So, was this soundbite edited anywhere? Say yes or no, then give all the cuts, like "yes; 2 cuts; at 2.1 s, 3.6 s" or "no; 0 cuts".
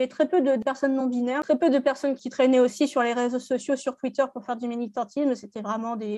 no; 0 cuts